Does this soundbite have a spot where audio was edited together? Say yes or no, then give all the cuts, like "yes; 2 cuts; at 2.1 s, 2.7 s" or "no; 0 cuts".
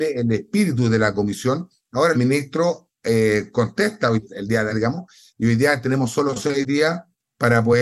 yes; 3 cuts; at 2.1 s, 4.3 s, 4.7 s